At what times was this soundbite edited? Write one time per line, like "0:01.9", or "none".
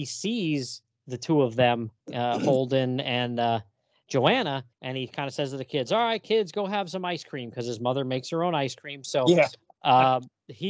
0:02.0
0:04.7

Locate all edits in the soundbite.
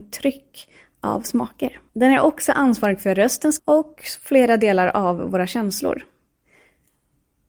0:01.9
0:03.6

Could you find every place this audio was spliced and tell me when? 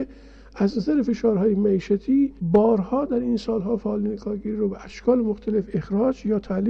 0:02.4

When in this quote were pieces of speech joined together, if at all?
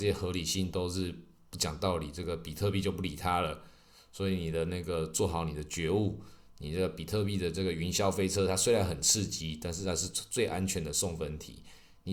none

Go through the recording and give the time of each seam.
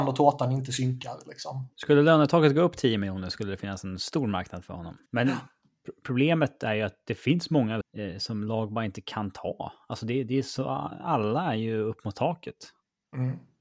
0:01.7
0:05.1
0:07.8

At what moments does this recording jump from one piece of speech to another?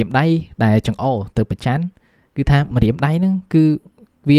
none

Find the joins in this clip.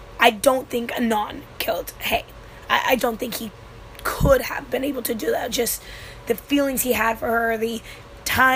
0:03.0

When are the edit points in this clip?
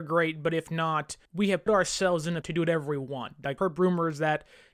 0:01.3
0:01.7
0:02.4
0:03.6

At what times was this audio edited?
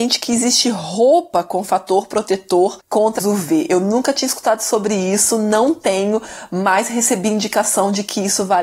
0:03.2

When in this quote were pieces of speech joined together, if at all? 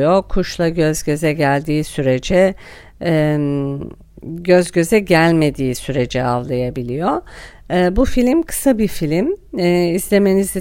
none

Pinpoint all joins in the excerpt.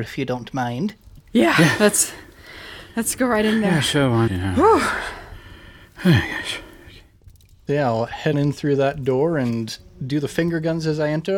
0:04.3
0:07.7
0:08.3

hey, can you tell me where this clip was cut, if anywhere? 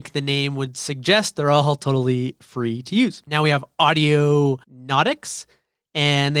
0:04.6

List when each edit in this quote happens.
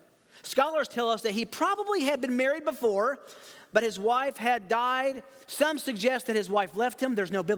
none

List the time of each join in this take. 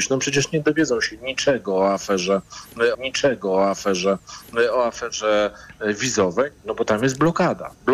0:02.9

